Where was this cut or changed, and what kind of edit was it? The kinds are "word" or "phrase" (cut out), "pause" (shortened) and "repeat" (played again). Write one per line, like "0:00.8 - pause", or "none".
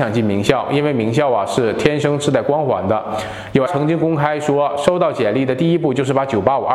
0:03.7 - word